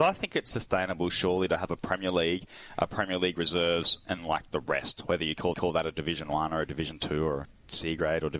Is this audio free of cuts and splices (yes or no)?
no